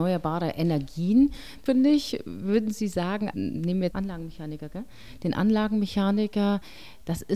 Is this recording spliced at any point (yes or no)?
yes